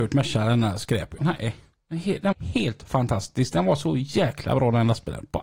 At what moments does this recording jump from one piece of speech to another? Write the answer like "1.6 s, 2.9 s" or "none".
1.2 s, 2.3 s

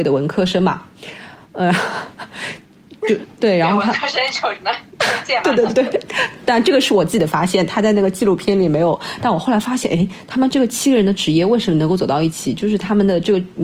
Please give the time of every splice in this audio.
1.4 s, 3.3 s

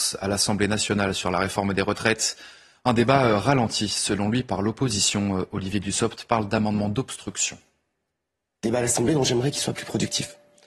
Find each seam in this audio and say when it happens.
none

